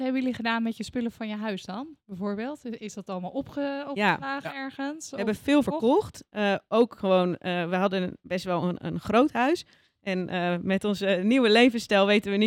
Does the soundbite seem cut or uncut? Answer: uncut